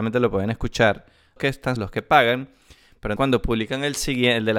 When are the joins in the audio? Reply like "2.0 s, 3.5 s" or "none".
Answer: 1.4 s, 1.8 s, 3.2 s